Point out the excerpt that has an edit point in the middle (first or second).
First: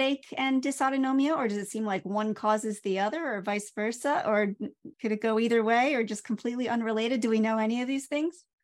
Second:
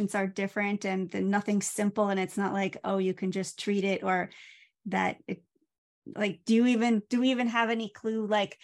first